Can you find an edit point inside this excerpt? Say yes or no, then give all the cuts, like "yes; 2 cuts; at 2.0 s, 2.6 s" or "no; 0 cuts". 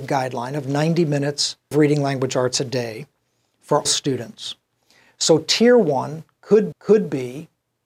yes; 3 cuts; at 1.7 s, 3.9 s, 6.7 s